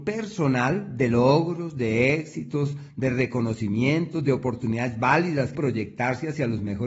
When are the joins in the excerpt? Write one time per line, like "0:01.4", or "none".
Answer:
0:05.5